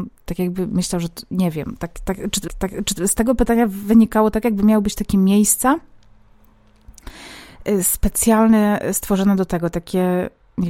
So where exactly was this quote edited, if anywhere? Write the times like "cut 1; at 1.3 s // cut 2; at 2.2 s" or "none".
cut 1; at 2.5 s